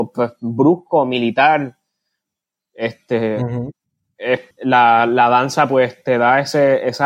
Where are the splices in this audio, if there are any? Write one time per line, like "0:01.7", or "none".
0:04.5